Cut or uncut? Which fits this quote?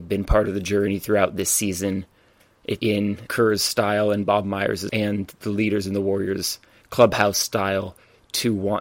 cut